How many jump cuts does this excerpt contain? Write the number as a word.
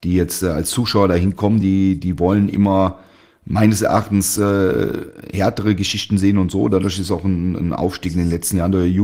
zero